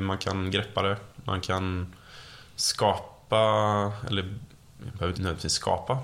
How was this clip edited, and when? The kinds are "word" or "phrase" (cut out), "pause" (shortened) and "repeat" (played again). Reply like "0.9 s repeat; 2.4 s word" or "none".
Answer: 5.1 s word

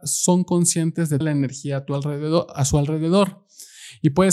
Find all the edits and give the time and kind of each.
1.2 s word

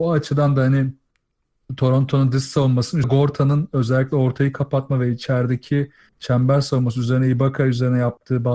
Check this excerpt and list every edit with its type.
3.0 s phrase

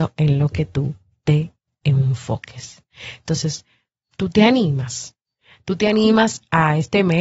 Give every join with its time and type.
none

